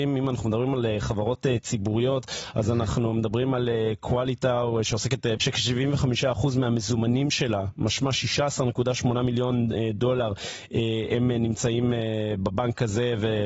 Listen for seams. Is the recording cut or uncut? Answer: cut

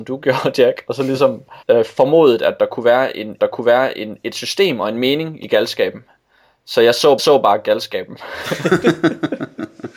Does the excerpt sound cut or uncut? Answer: cut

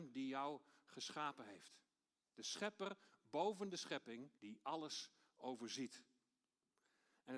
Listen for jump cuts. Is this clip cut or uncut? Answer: cut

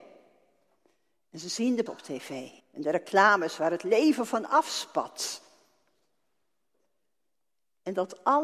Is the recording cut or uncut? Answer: cut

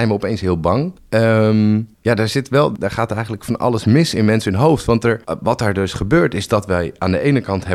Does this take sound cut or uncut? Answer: cut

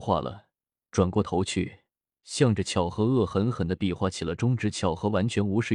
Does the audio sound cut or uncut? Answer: uncut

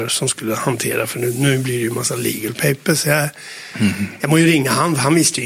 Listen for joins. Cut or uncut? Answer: uncut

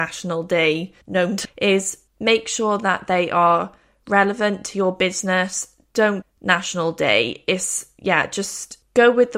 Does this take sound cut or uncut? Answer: cut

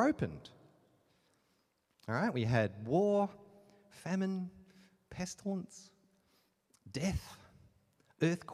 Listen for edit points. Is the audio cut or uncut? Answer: uncut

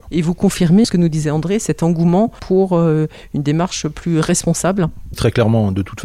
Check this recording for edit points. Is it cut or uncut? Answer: uncut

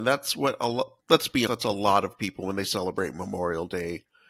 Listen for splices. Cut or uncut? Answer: cut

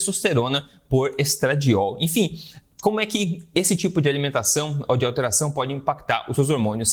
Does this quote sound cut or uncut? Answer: uncut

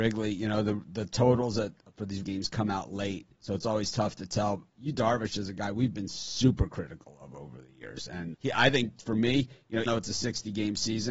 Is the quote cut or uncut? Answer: cut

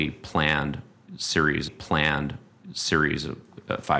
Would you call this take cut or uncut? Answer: cut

